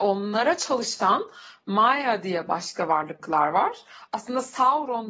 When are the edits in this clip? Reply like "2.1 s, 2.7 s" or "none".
none